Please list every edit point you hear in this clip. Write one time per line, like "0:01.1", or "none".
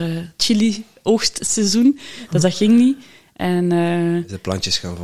none